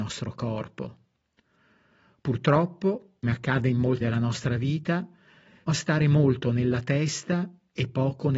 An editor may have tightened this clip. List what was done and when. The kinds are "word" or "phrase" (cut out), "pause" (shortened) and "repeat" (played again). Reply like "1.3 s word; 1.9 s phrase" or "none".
3.2 s word; 4.0 s phrase; 5.7 s word